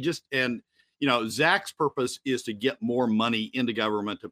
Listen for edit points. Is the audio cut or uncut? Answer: uncut